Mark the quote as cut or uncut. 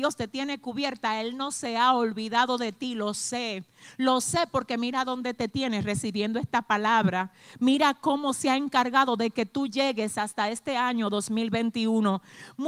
uncut